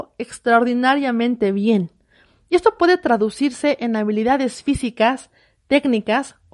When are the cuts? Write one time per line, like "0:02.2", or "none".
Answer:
none